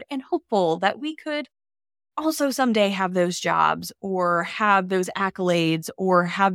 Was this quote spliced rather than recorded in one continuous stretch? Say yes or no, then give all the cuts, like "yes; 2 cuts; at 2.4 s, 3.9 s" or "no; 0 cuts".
no; 0 cuts